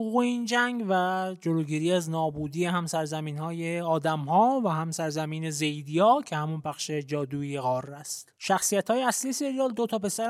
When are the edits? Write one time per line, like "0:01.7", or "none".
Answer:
0:08.4